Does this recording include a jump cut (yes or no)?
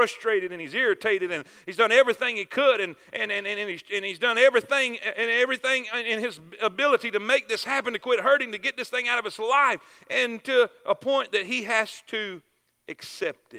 no